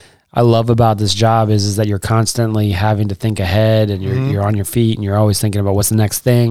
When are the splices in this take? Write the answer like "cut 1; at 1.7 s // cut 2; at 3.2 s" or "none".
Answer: none